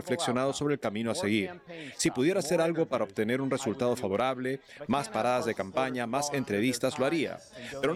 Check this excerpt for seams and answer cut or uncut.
uncut